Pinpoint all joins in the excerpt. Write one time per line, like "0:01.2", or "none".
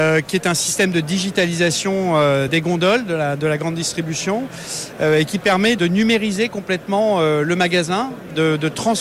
0:02.5
0:05.8